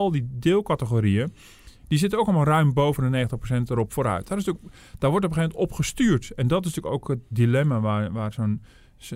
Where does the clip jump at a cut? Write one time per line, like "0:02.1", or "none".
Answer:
none